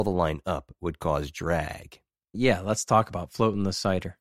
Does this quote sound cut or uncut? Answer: uncut